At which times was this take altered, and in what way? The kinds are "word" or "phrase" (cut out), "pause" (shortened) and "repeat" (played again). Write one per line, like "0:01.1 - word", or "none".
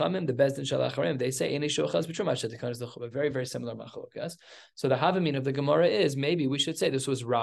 none